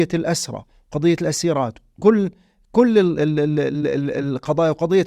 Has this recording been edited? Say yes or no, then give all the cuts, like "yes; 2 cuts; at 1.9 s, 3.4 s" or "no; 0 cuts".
no; 0 cuts